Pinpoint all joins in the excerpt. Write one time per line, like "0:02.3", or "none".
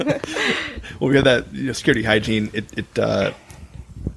none